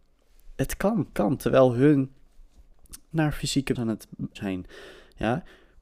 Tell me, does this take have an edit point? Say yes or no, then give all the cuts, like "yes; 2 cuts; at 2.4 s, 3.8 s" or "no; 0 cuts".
yes; 4 cuts; at 1.1 s, 3.1 s, 3.7 s, 4.4 s